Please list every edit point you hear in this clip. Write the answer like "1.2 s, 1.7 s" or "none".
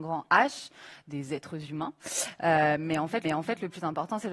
3.2 s